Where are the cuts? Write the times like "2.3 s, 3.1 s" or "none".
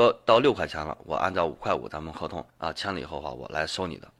2.5 s